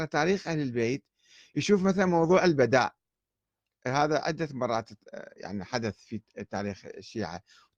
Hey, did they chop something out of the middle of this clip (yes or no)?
no